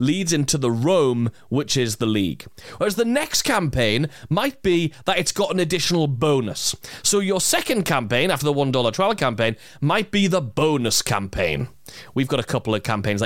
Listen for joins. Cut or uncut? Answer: uncut